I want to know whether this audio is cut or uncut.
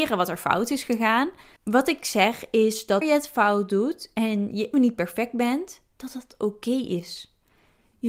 cut